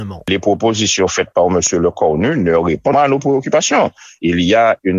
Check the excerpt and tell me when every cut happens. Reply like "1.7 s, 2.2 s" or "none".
2.9 s